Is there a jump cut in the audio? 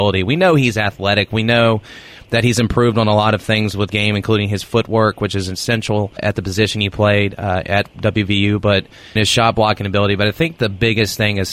yes; 3 cuts; at 3.9 s, 6.2 s, 9.2 s

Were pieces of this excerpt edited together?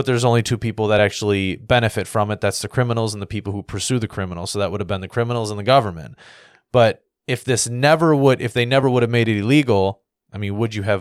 no; 0 cuts

